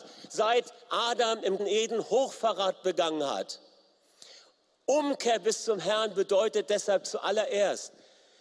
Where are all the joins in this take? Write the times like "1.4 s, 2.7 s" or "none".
1.6 s